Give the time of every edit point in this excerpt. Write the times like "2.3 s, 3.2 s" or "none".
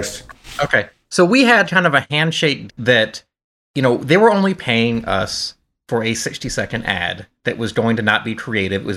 2.7 s